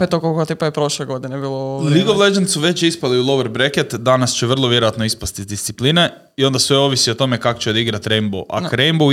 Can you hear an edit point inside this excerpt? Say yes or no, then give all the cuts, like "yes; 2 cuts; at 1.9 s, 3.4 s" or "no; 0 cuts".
no; 0 cuts